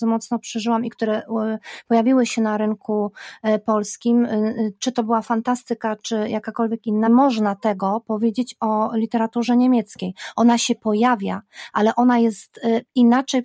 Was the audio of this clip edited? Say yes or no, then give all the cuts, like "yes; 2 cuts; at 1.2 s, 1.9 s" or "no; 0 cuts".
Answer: yes; 1 cut; at 7.1 s